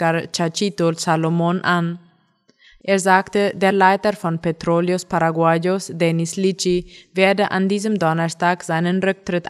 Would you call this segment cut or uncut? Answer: uncut